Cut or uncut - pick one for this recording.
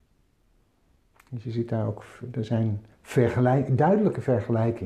cut